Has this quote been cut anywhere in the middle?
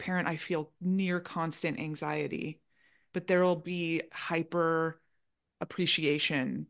yes; 1 cut; at 4.1 s

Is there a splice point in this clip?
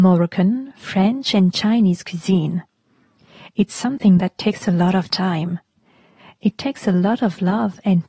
no; 0 cuts

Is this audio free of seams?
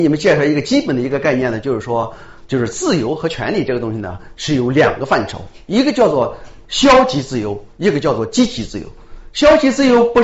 yes; 0 cuts

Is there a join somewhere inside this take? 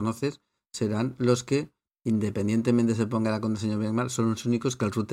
no; 0 cuts

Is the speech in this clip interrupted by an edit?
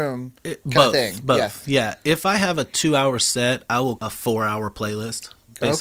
yes; 1 cut; at 4.0 s

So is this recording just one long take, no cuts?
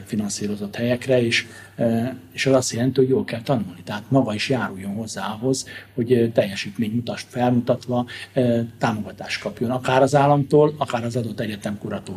yes; 0 cuts

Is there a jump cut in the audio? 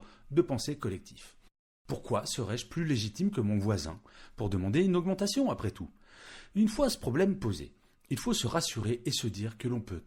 no; 0 cuts

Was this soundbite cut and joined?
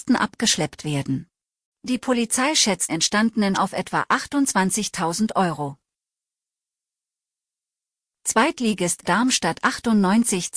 yes; 4 cuts; at 1.5 s, 2.9 s, 3.5 s, 9.0 s

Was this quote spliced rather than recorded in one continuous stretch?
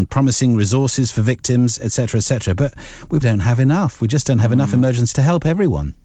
yes; 2 cuts; at 3.2 s, 5.1 s

